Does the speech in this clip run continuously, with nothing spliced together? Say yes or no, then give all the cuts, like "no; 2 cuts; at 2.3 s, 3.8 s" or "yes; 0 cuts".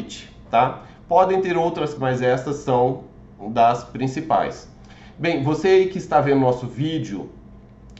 no; 1 cut; at 2.0 s